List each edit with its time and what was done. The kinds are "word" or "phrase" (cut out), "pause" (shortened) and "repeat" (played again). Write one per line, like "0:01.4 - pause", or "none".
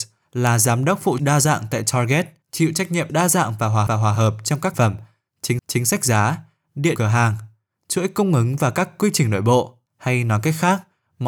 0:01.2 - phrase
0:02.4 - pause
0:03.1 - phrase
0:03.9 - repeat
0:04.7 - word
0:05.6 - repeat
0:07.0 - word
0:09.9 - pause

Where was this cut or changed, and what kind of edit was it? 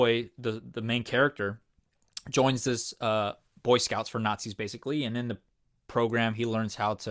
none

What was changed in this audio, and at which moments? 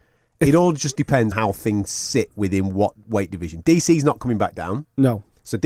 0:01.3 - word

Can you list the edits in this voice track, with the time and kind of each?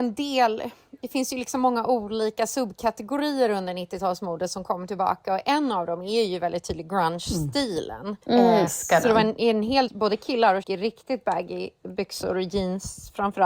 0:08.2 - pause
0:08.7 - word
0:09.9 - word
0:10.6 - phrase

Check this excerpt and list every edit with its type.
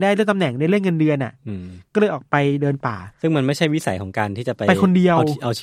0:03.1 - pause

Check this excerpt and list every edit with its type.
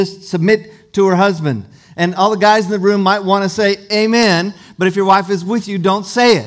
none

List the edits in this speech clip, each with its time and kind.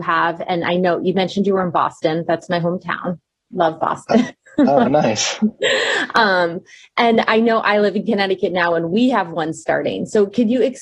none

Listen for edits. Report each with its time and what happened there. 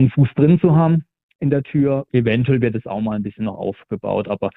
none

